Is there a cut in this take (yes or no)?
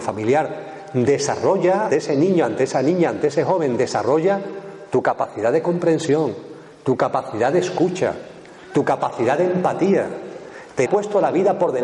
yes